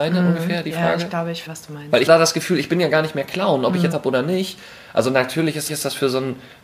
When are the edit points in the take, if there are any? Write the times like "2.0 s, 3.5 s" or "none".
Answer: 1.5 s, 2.1 s, 3.9 s, 5.7 s